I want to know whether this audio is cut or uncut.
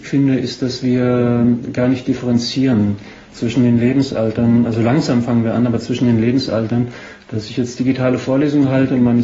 uncut